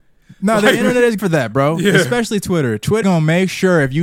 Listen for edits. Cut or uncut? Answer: cut